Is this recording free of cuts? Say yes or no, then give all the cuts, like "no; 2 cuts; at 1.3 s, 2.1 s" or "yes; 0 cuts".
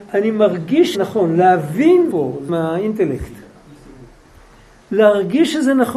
no; 3 cuts; at 0.9 s, 2.1 s, 2.5 s